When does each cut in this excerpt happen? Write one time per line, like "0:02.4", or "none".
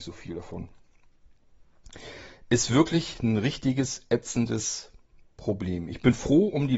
none